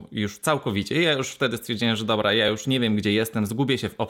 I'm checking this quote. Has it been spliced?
no; 0 cuts

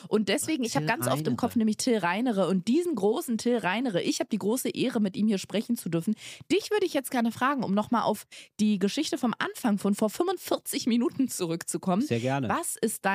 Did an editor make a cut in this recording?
no; 0 cuts

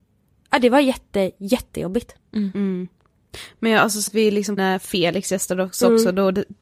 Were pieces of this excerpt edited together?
yes; 2 cuts; at 4.1 s, 4.6 s

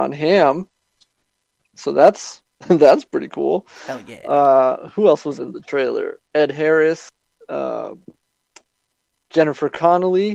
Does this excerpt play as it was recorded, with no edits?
yes; 0 cuts

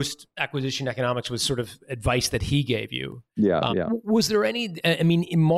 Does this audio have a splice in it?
yes; 1 cut; at 3.7 s

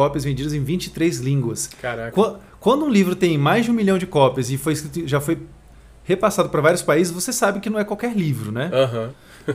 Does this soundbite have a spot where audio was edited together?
no; 0 cuts

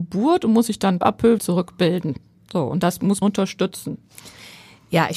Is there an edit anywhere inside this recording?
yes; 3 cuts; at 1.0 s, 1.4 s, 3.2 s

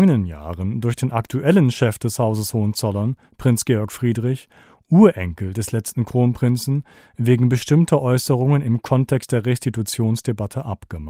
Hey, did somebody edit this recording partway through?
no; 0 cuts

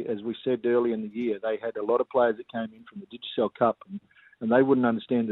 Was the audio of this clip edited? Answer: no; 0 cuts

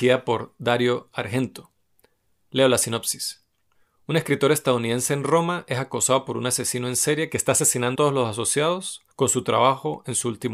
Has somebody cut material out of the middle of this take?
yes; 2 cuts; at 7.9 s, 9.1 s

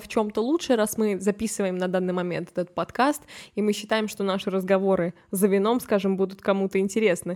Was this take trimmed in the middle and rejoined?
no; 0 cuts

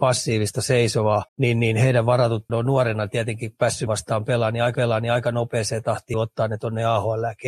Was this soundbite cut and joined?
yes; 5 cuts; at 1.3 s, 2.5 s, 3.9 s, 4.7 s, 6.1 s

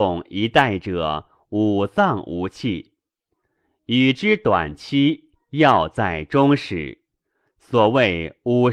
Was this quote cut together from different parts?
no; 0 cuts

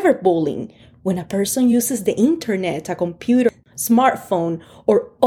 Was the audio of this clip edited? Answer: no; 0 cuts

